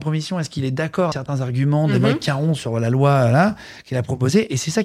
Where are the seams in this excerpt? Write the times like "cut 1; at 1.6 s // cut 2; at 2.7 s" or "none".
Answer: cut 1; at 1.1 s